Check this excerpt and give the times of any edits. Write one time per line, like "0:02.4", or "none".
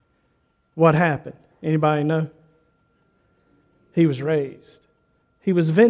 none